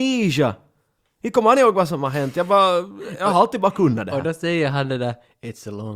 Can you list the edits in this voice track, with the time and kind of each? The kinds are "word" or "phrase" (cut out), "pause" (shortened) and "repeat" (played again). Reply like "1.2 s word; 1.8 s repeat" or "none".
none